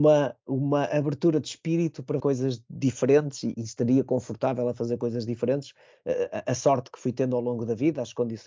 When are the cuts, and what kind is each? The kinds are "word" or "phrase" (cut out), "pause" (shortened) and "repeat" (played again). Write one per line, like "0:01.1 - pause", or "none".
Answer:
0:02.2 - word
0:03.5 - word